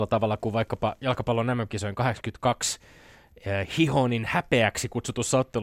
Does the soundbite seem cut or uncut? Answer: uncut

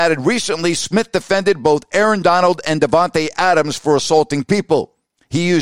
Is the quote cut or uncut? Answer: uncut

